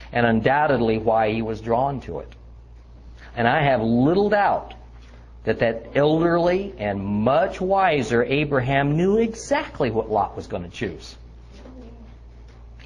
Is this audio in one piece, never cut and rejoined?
yes; 0 cuts

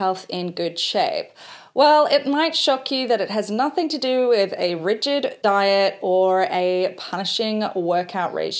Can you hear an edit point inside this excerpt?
no; 0 cuts

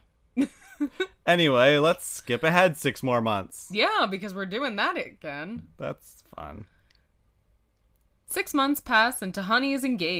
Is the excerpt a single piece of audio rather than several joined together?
yes; 0 cuts

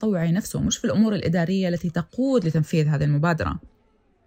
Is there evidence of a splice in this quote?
no; 0 cuts

